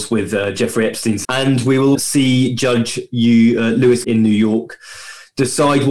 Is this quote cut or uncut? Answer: cut